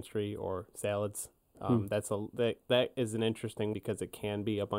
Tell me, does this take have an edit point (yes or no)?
yes